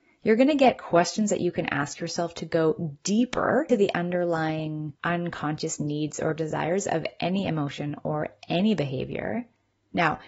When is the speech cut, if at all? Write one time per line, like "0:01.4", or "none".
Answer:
0:03.7
0:05.0